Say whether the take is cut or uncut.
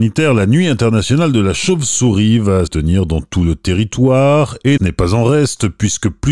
cut